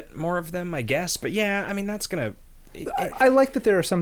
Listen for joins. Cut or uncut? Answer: cut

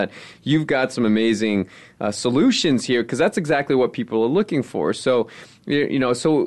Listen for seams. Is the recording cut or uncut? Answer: uncut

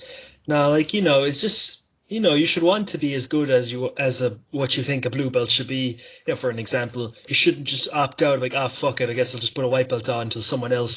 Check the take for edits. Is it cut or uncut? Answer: uncut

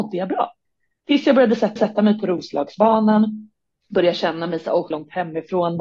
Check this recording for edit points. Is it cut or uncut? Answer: cut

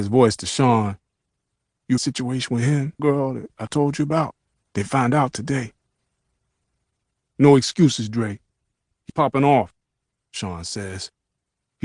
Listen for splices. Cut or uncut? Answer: cut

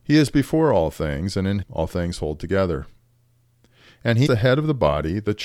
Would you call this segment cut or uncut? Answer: cut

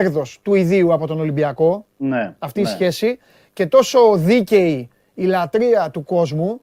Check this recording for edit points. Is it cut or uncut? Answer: cut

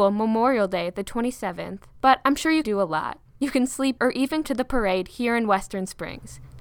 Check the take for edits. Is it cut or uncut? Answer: cut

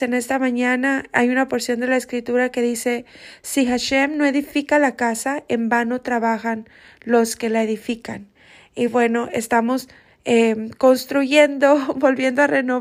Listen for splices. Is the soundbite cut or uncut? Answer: uncut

